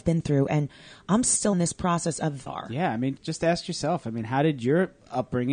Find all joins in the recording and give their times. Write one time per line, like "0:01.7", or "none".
0:01.5
0:02.5
0:03.2